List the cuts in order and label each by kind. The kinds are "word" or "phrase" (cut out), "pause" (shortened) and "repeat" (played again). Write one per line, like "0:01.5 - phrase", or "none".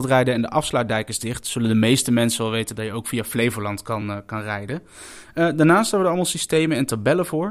none